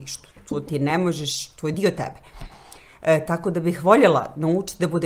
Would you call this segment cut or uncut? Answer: uncut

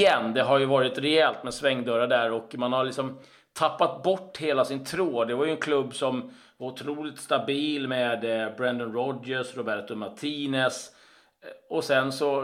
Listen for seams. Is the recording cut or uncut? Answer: uncut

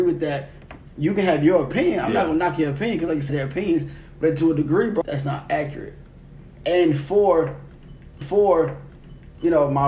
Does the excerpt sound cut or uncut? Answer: cut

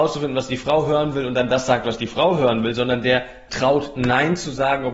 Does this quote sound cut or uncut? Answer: cut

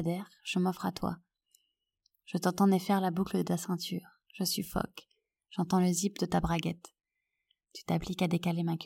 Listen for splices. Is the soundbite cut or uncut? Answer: uncut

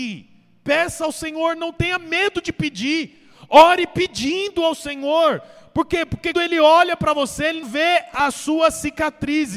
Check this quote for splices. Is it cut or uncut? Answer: cut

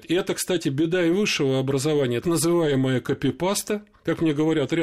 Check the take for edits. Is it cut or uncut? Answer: cut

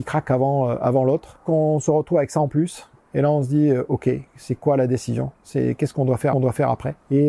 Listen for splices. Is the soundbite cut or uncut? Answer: cut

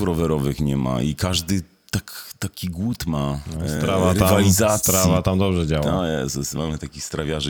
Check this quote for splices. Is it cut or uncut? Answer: uncut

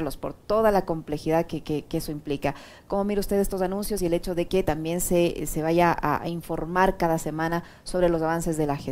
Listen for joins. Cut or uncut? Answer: uncut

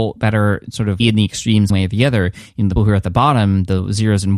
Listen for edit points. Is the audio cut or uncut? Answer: cut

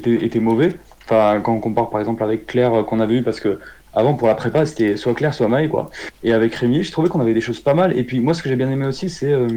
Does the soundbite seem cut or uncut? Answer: cut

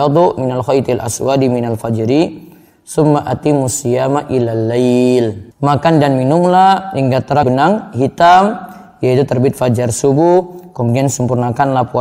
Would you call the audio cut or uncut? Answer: cut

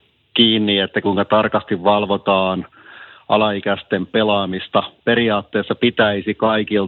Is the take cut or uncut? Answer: uncut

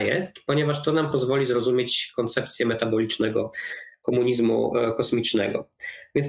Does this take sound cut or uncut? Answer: uncut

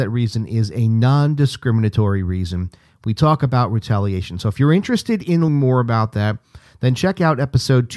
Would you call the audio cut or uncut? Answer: cut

